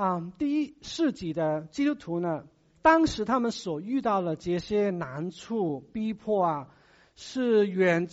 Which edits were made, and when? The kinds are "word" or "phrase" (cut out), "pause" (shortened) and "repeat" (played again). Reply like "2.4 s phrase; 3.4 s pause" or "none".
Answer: none